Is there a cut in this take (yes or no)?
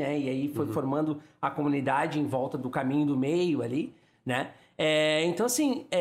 no